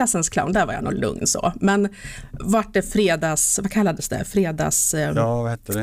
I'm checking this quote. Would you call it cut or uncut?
uncut